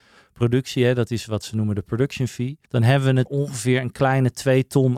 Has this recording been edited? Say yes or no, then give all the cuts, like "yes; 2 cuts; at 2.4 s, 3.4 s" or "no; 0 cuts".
yes; 2 cuts; at 2.7 s, 3.3 s